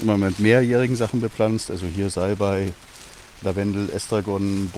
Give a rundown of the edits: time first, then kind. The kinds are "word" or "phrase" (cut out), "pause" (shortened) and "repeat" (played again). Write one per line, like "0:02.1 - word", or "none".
none